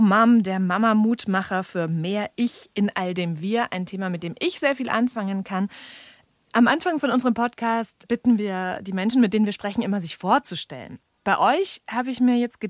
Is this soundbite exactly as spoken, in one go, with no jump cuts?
yes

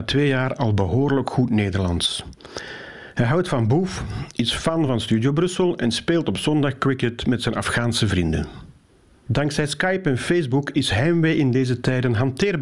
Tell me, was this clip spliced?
no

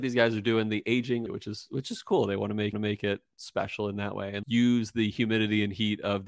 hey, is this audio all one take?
no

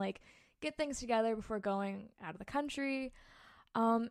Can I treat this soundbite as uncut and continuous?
yes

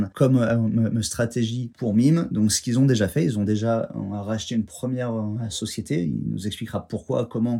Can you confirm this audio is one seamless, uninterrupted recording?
yes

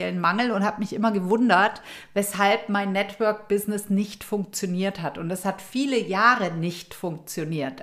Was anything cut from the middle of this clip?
no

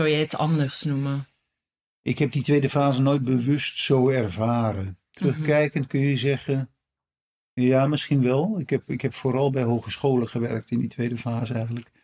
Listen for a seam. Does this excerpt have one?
no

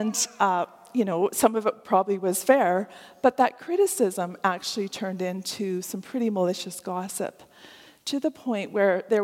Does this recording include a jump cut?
no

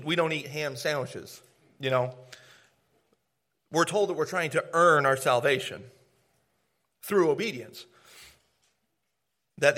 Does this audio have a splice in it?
no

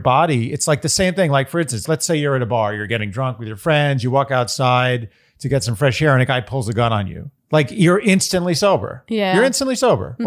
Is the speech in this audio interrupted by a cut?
yes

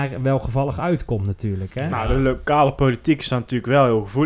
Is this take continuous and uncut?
yes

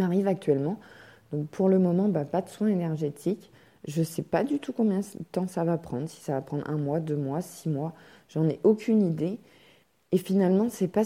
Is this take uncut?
yes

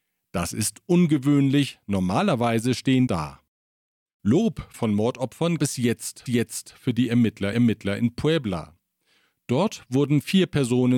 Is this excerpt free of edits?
no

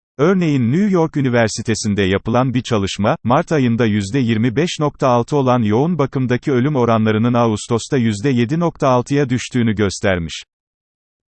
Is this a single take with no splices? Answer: yes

